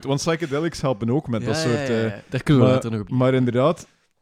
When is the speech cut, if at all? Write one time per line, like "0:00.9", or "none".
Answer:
0:03.1